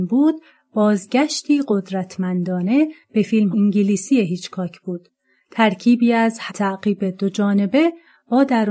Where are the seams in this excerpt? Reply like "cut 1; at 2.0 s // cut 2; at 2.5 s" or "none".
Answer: cut 1; at 3.5 s // cut 2; at 6.5 s